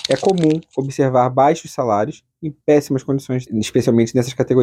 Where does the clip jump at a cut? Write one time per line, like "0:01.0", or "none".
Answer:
0:03.5